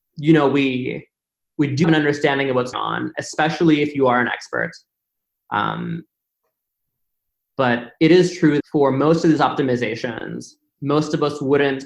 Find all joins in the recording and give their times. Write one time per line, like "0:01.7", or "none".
0:01.8
0:02.7
0:08.6